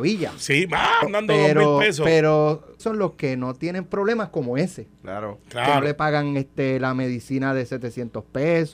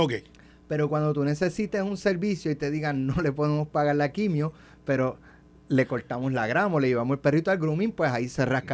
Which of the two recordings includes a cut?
first; 2 cuts; at 1.0 s, 2.8 s

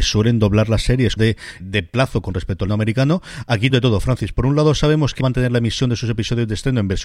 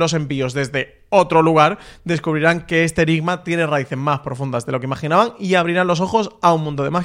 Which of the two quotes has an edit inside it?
first; 5 cuts; at 1.2 s, 1.6 s, 2.7 s, 3.7 s, 5.2 s

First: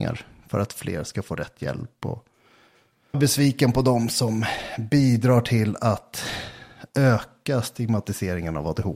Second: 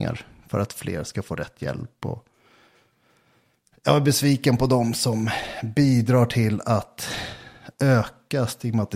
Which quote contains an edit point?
first; 1 cut; at 3.1 s

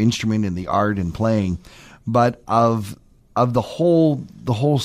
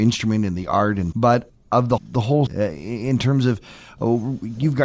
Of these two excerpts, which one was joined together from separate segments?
second; 4 cuts; at 1.1 s, 1.5 s, 2.0 s, 2.5 s

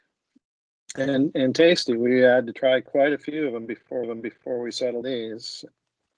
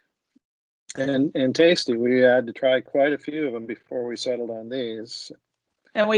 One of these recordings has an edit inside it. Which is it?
first; 2 cuts; at 4.0 s, 5.0 s

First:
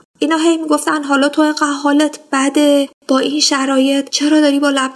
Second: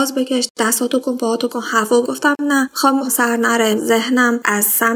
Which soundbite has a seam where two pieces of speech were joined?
second; 5 cuts; at 1.0 s, 1.5 s, 2.0 s, 3.0 s, 3.8 s

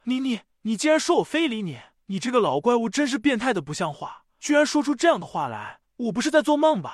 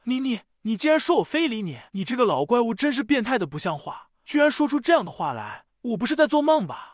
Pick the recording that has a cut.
second; 1 cut; at 1.9 s

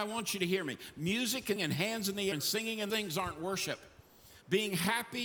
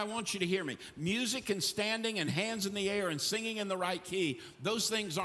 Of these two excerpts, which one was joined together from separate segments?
first; 3 cuts; at 1.6 s, 2.3 s, 2.9 s

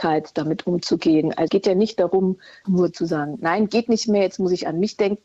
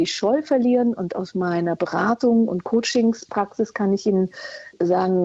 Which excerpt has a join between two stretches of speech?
first; 2 cuts; at 1.5 s, 2.6 s

